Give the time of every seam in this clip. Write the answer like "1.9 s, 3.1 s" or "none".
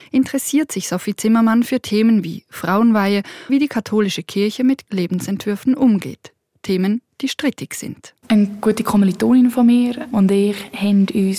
3.5 s, 4.9 s, 8.2 s